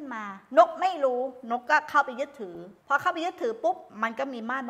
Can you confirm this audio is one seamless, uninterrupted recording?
no; 1 cut; at 2.8 s

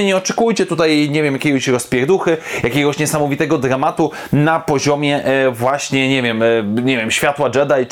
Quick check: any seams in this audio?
no; 0 cuts

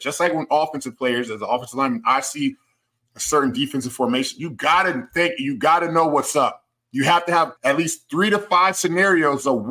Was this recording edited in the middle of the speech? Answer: yes; 1 cut; at 7.6 s

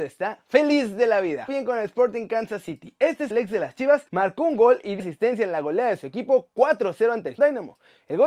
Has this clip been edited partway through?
yes; 5 cuts; at 1.5 s, 3.3 s, 4.1 s, 5.0 s, 7.4 s

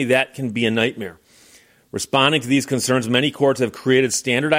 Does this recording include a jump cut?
no; 0 cuts

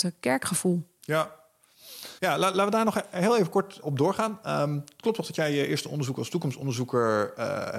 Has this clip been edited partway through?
yes; 2 cuts; at 2.2 s, 3.8 s

